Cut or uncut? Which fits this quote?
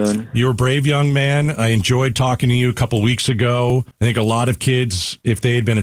cut